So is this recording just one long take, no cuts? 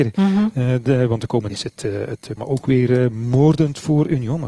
no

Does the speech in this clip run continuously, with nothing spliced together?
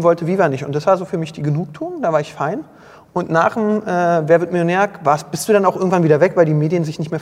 yes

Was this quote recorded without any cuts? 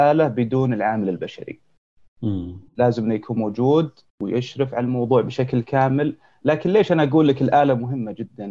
yes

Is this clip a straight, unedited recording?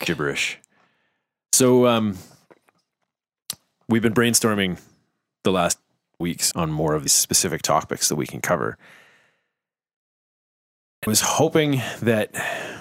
no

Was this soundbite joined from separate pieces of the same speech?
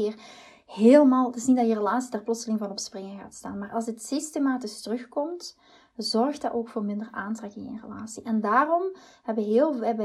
no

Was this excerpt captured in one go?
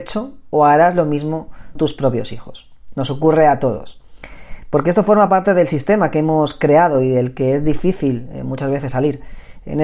no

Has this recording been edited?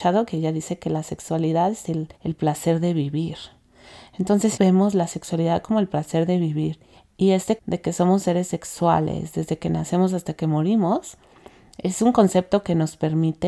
yes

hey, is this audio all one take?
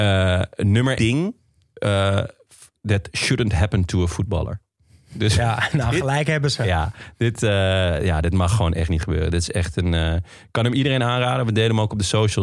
no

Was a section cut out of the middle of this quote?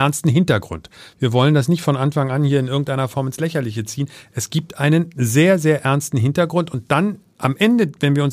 no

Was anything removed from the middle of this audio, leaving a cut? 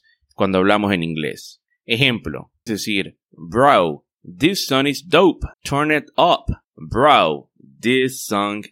yes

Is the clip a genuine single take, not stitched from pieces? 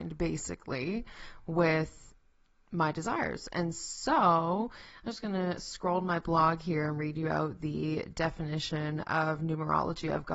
yes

